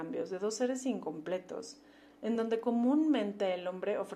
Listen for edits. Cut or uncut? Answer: uncut